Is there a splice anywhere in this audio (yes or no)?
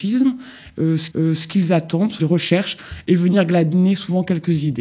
yes